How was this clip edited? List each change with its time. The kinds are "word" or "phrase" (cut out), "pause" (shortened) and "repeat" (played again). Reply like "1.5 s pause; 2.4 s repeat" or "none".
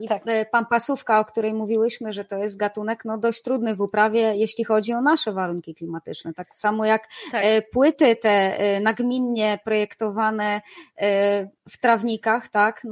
11.6 s pause